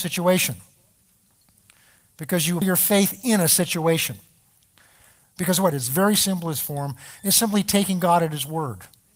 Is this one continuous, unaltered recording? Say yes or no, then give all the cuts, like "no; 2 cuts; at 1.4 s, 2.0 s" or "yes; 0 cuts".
no; 2 cuts; at 2.6 s, 5.7 s